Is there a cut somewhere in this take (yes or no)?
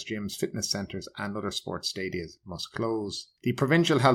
no